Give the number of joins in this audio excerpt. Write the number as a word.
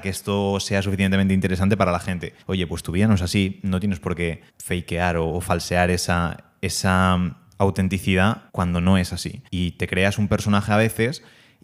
four